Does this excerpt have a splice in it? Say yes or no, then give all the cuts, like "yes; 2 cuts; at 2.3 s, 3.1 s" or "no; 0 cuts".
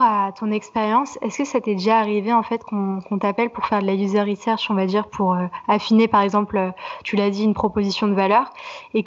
no; 0 cuts